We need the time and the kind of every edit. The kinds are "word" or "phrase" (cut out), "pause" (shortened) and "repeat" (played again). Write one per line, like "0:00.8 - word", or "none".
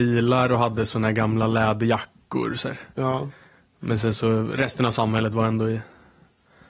none